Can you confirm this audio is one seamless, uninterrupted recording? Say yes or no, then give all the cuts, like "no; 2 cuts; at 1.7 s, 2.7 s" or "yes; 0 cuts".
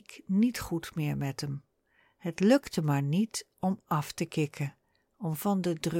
yes; 0 cuts